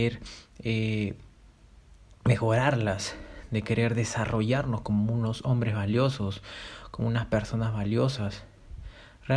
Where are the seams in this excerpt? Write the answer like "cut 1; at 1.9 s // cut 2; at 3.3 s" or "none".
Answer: none